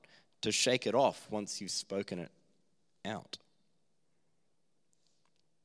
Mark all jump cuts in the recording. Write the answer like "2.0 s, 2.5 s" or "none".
none

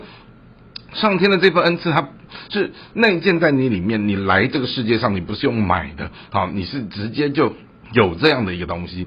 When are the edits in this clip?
7.8 s

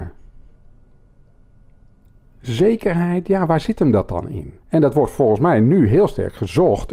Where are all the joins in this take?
4.6 s

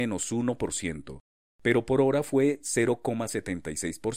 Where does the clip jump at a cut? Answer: none

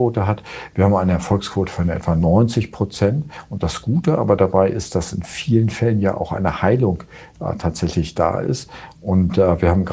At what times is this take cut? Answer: none

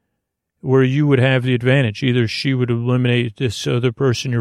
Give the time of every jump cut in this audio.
none

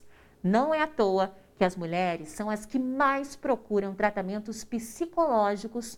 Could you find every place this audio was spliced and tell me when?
none

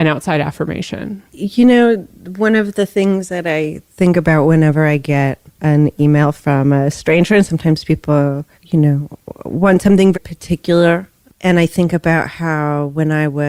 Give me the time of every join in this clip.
1.3 s, 5.5 s, 8.5 s, 10.1 s

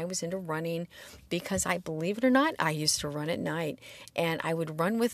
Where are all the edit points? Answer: none

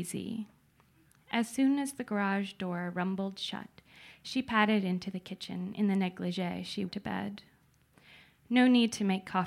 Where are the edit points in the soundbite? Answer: 6.9 s

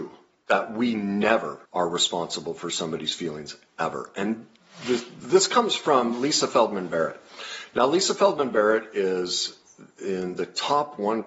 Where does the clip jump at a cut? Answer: 1.6 s

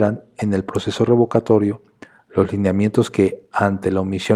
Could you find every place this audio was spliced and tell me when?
none

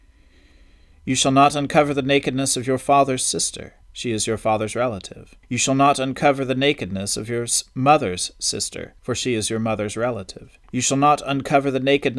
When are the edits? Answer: 3.8 s, 5.4 s, 9.0 s, 10.6 s

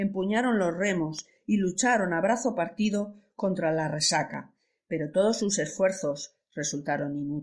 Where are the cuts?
none

